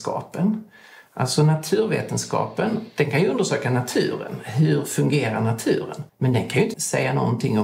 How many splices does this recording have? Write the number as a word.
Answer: two